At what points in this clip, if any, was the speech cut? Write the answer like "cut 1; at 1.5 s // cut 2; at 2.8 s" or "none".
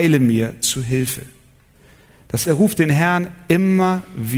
cut 1; at 2.4 s